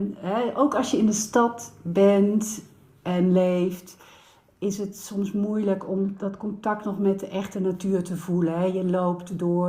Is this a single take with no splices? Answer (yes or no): yes